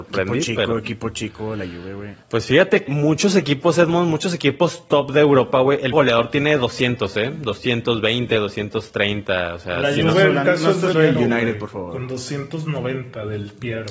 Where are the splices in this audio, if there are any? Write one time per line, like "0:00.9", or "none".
0:02.2
0:02.9
0:05.9
0:10.9